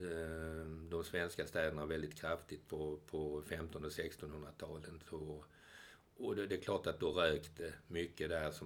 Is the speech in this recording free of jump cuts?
yes; 0 cuts

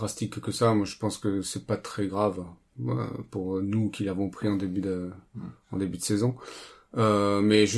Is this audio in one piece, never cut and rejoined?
yes; 0 cuts

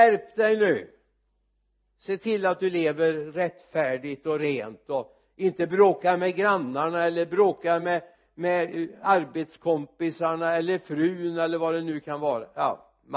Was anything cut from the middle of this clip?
no; 0 cuts

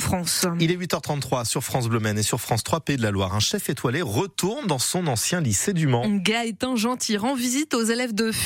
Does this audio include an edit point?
no; 0 cuts

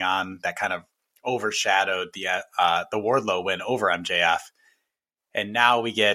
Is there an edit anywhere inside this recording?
no; 0 cuts

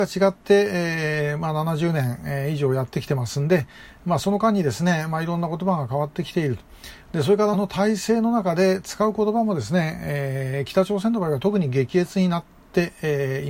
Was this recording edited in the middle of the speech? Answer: yes; 1 cut; at 7.5 s

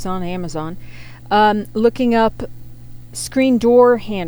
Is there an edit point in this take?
yes; 1 cut; at 3.1 s

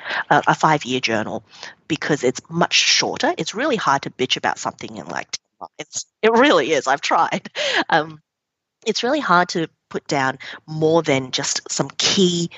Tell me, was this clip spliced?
no; 0 cuts

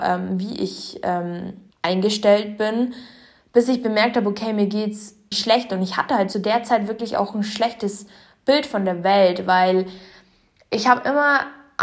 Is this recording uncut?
no; 3 cuts; at 1.7 s, 5.3 s, 6.3 s

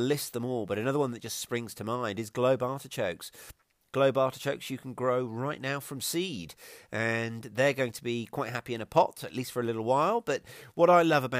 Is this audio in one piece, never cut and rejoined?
yes; 0 cuts

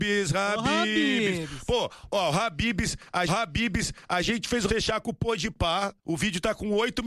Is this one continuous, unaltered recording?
no; 3 cuts; at 3.3 s, 4.7 s, 6.0 s

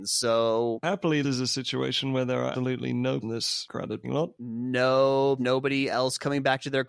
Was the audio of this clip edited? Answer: yes; 5 cuts; at 1.2 s, 2.5 s, 3.2 s, 4.0 s, 5.4 s

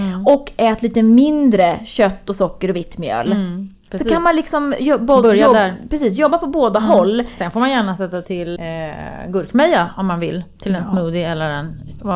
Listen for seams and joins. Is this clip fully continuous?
no; 1 cut; at 8.6 s

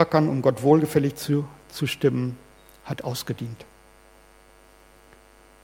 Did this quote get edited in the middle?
no; 0 cuts

